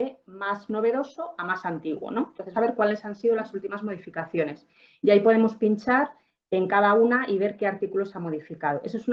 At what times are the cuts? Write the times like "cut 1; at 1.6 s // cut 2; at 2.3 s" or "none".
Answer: cut 1; at 2.5 s